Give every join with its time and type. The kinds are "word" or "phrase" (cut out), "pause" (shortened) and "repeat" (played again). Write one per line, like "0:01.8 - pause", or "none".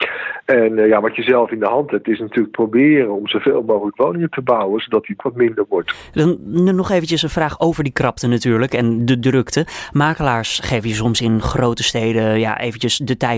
0:02.5 - word
0:05.2 - word